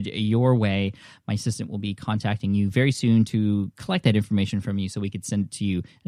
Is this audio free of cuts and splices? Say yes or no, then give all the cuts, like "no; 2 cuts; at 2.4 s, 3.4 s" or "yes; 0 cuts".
yes; 0 cuts